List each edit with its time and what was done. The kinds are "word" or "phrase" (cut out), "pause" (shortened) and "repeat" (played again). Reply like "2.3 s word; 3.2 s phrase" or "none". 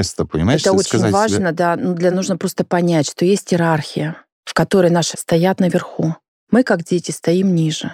2.1 s word; 5.1 s word